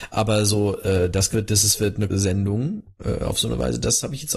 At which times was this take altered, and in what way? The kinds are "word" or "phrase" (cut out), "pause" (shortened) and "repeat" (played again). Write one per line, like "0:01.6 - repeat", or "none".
0:01.3 - word
0:02.1 - word